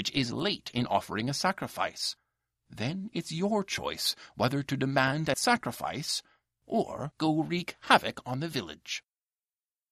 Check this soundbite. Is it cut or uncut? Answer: cut